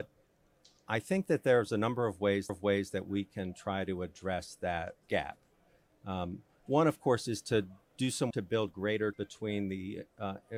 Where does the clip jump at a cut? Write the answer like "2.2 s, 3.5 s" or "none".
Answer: 2.5 s, 5.0 s, 7.8 s, 8.3 s, 9.1 s